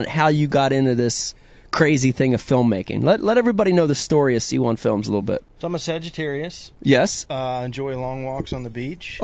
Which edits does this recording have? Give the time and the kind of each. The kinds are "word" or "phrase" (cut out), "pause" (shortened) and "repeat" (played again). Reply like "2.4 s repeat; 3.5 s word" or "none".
none